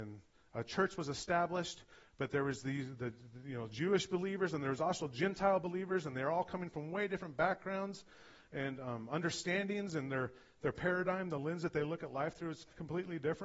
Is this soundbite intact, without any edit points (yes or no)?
yes